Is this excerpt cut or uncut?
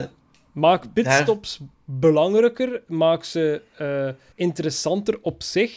cut